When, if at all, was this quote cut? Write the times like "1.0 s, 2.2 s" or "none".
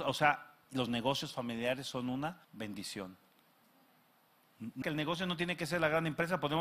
2.4 s, 4.8 s